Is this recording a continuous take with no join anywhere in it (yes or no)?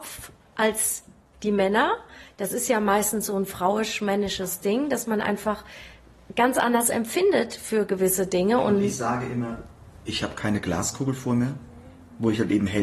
yes